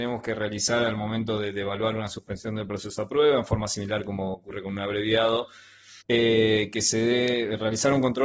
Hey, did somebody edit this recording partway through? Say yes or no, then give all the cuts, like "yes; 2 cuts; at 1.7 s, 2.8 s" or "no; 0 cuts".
yes; 1 cut; at 6.0 s